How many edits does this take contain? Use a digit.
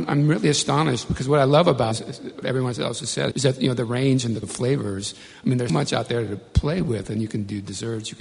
5